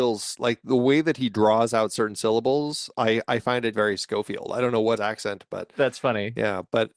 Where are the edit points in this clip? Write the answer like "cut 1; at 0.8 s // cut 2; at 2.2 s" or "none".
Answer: cut 1; at 3.7 s // cut 2; at 5.0 s